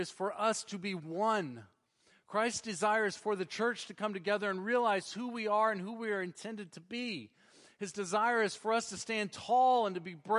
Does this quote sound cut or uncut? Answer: uncut